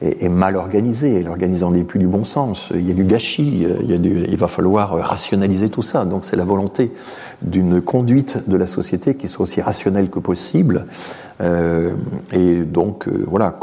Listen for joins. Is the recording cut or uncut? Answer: uncut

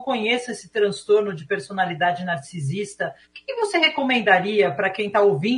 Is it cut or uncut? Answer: cut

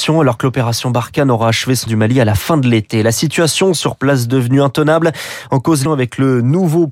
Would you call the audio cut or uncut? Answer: cut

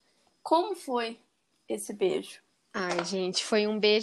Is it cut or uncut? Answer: cut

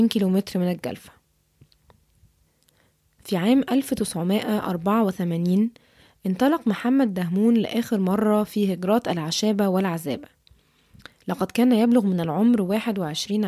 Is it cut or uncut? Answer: uncut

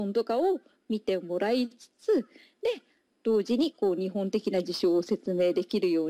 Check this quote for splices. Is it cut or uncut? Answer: uncut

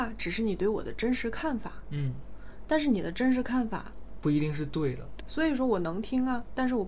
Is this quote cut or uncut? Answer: cut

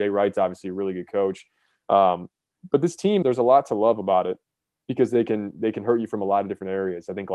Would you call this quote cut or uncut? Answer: cut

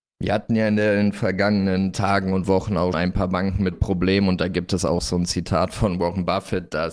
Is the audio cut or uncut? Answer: cut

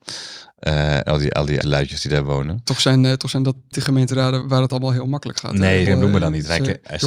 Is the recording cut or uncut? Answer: cut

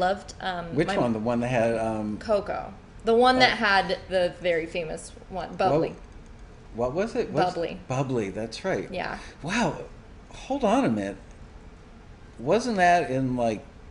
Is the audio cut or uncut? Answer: cut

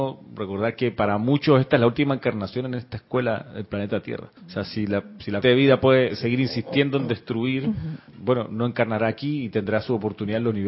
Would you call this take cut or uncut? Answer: cut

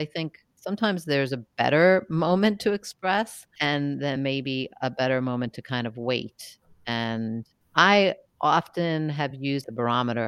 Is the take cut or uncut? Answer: uncut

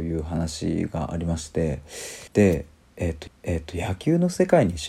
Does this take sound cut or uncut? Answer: cut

